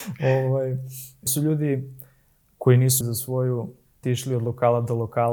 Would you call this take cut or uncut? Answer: cut